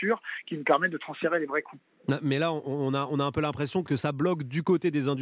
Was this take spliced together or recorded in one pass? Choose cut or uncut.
cut